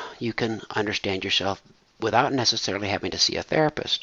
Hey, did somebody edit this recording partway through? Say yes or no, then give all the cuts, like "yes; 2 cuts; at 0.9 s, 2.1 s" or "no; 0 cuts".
no; 0 cuts